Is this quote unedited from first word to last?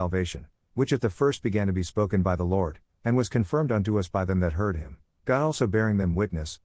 yes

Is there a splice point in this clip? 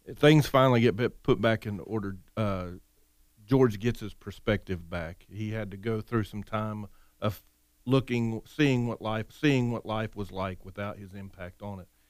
yes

